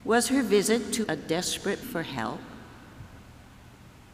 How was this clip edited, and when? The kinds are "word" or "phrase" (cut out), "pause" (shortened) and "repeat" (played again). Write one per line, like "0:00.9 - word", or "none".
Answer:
0:01.0 - word
0:01.8 - word